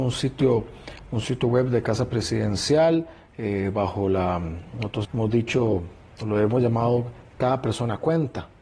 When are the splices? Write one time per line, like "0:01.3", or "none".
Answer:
0:05.0